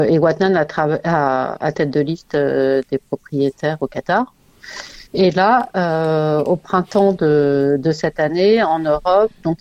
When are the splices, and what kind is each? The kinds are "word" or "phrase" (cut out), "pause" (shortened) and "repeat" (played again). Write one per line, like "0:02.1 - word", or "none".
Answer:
0:01.7 - word
0:05.1 - pause